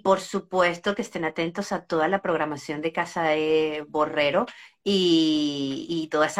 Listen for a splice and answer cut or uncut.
uncut